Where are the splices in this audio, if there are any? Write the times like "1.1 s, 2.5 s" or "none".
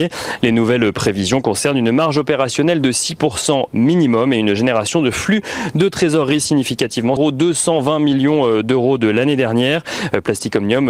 7.2 s

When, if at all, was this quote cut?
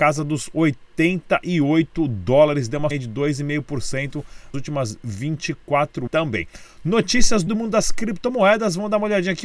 2.9 s, 4.5 s, 6.1 s, 7.5 s

